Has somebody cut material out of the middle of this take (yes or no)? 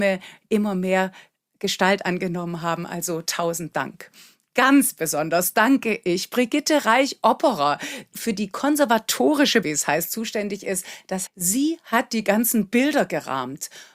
yes